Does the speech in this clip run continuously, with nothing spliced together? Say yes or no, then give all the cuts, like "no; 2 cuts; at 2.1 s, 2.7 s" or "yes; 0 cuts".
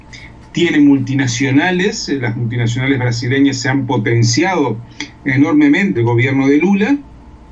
no; 1 cut; at 6.0 s